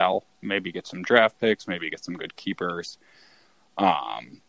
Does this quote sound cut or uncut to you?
uncut